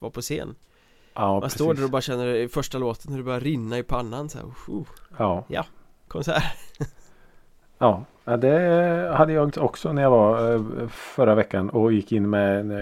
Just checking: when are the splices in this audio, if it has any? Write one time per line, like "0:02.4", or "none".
0:09.5